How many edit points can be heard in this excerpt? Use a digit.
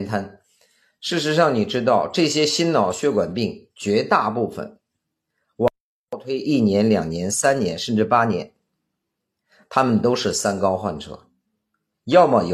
0